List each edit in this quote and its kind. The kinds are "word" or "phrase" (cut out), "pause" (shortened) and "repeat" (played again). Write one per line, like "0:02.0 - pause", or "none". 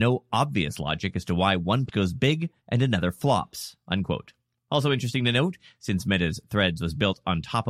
0:01.9 - word
0:02.6 - pause
0:04.5 - pause